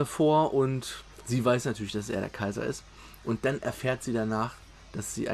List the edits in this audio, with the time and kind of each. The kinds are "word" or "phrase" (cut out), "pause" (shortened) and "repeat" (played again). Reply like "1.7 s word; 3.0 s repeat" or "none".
none